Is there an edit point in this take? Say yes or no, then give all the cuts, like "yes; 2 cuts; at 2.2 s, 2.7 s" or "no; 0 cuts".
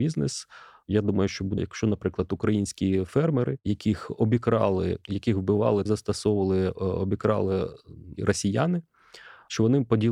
yes; 2 cuts; at 1.6 s, 5.9 s